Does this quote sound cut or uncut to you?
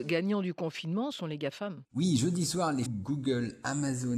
cut